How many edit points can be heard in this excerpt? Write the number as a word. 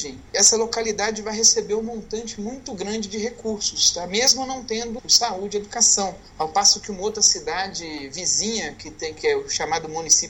one